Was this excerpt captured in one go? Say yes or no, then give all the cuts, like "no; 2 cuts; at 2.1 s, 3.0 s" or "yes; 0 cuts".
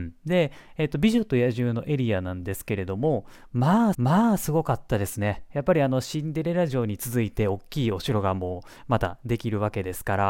no; 1 cut; at 3.9 s